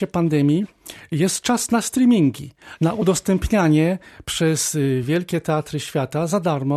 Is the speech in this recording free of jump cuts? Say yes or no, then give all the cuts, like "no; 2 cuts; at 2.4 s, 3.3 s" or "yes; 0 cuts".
yes; 0 cuts